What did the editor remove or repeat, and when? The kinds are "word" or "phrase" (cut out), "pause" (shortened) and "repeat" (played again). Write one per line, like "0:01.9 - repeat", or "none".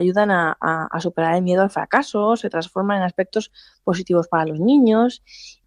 none